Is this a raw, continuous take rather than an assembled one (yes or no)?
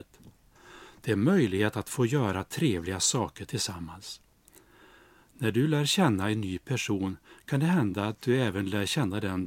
yes